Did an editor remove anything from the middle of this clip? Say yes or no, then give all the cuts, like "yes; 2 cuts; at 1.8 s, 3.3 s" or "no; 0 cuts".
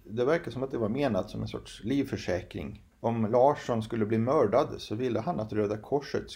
yes; 1 cut; at 2.9 s